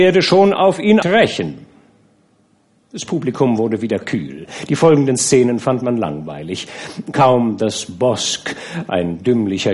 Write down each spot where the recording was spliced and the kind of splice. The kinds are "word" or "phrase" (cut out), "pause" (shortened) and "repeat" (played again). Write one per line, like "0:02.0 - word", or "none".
0:01.0 - phrase